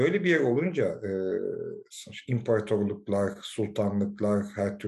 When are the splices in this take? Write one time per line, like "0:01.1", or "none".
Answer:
none